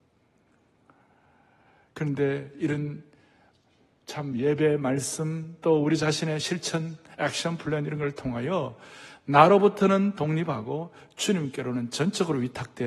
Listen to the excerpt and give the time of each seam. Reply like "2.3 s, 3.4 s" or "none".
none